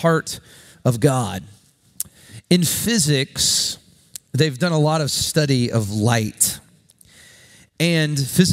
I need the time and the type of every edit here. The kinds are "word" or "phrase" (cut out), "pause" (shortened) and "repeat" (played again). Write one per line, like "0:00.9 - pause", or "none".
none